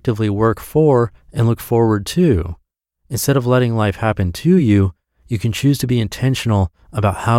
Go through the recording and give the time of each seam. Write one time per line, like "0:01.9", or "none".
none